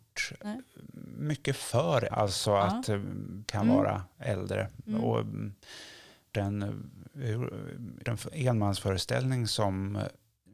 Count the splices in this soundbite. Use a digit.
4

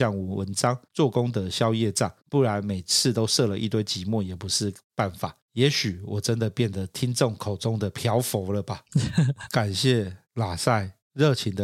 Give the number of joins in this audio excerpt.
1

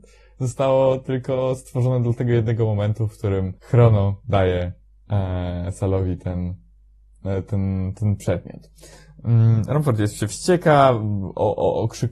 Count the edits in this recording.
1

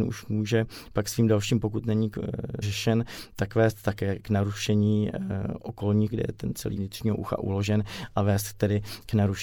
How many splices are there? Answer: 4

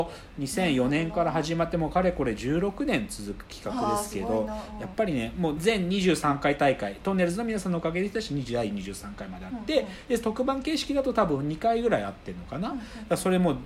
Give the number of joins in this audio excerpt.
1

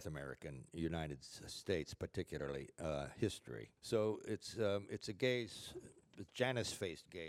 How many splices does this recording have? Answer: 1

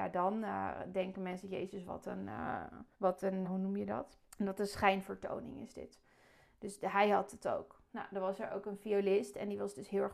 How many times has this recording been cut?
3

